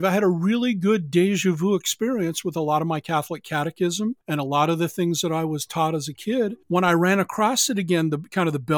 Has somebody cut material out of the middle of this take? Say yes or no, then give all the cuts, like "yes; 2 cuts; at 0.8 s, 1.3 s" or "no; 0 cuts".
yes; 2 cuts; at 4.2 s, 6.6 s